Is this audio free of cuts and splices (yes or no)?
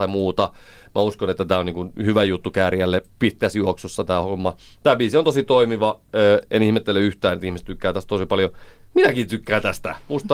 yes